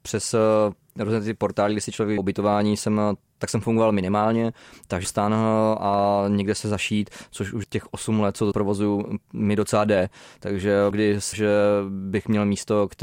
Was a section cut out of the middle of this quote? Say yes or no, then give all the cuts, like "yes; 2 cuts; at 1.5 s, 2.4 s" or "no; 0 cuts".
yes; 7 cuts; at 2.2 s, 3.4 s, 5.0 s, 7.6 s, 8.5 s, 10.9 s, 11.3 s